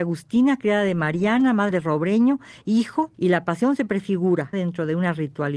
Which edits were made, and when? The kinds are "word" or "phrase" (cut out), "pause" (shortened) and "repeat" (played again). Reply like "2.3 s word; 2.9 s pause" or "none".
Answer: 1.7 s word; 3.1 s pause; 4.5 s word

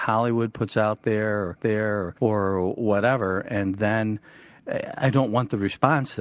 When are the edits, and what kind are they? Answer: 1.6 s repeat

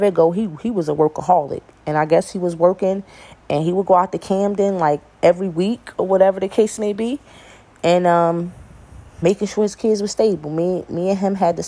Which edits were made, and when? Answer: 9.1 s pause

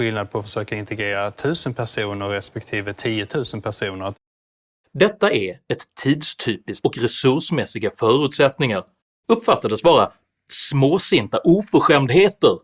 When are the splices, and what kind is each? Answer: 6.8 s phrase

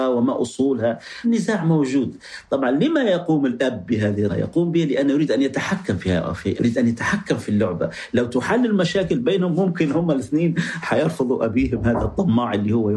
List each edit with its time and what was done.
1.2 s word; 4.3 s word; 6.6 s word

